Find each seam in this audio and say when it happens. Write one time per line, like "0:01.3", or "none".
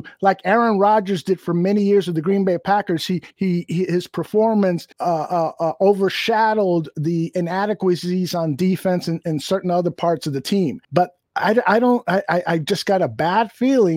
0:03.3
0:04.9
0:10.8